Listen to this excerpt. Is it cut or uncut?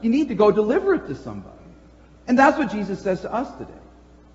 uncut